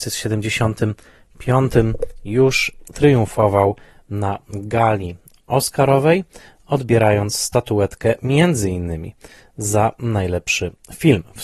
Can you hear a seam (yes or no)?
no